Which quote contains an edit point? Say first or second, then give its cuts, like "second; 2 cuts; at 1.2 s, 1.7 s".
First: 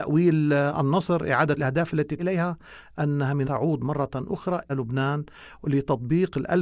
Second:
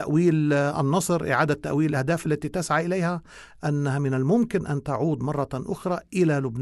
first; 4 cuts; at 1.6 s, 2.2 s, 3.4 s, 4.7 s